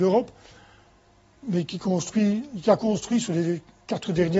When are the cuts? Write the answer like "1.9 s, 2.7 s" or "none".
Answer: none